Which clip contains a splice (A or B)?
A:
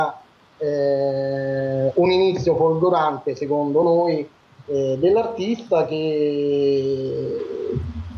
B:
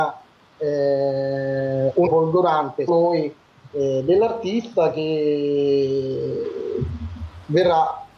B